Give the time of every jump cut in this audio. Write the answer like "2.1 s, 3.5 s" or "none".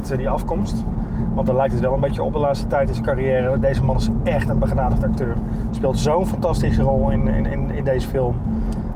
none